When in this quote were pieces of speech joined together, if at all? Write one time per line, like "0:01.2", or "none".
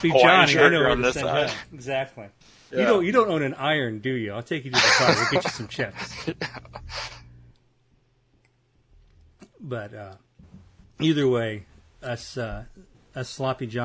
none